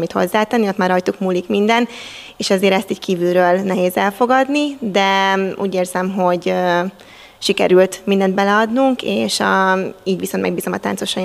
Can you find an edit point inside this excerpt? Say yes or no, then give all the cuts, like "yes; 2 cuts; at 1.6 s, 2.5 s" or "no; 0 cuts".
no; 0 cuts